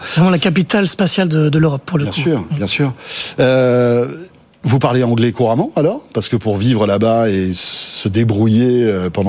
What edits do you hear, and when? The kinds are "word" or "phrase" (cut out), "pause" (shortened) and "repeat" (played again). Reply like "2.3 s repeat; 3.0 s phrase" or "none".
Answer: none